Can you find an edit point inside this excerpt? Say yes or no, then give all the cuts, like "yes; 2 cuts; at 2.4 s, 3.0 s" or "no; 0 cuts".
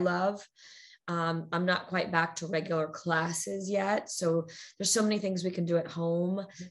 no; 0 cuts